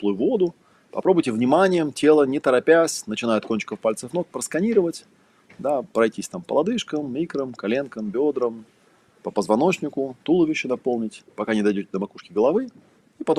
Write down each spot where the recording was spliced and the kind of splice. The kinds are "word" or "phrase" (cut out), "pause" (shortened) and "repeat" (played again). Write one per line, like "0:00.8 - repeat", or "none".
0:10.2 - pause